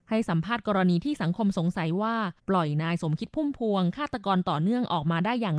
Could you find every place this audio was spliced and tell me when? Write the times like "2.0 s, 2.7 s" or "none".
2.4 s

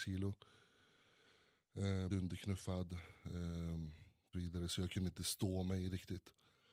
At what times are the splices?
2.1 s, 4.3 s

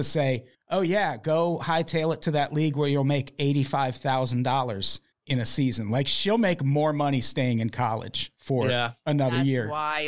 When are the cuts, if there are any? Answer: 8.4 s

